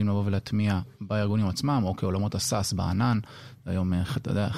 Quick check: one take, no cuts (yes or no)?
yes